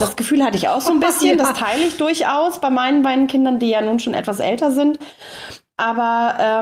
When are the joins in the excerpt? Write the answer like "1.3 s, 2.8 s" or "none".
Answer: none